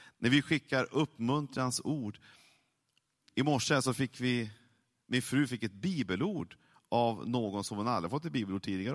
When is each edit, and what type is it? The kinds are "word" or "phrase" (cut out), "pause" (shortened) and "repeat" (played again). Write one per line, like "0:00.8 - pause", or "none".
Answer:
none

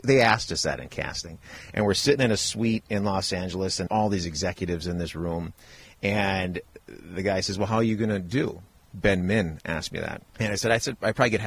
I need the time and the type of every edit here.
0:03.9 - word
0:06.8 - pause
0:10.3 - pause

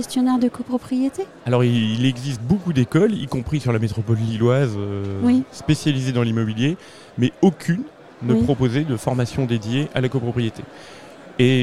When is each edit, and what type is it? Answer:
none

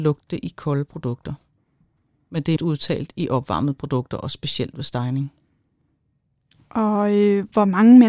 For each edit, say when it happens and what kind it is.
0:02.6 - word

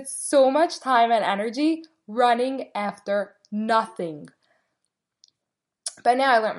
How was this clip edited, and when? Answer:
none

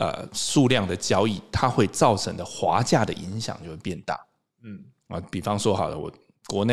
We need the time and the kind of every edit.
none

